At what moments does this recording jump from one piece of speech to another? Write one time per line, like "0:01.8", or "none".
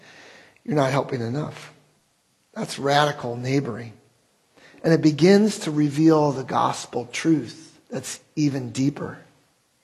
0:07.8